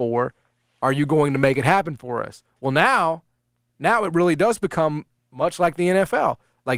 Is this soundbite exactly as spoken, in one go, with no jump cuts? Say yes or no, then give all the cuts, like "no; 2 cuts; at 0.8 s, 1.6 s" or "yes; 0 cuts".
yes; 0 cuts